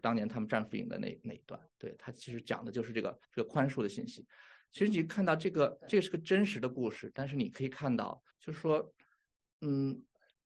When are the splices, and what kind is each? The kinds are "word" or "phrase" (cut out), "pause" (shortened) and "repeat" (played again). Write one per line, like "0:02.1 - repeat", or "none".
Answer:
0:01.7 - pause
0:03.2 - pause
0:08.3 - pause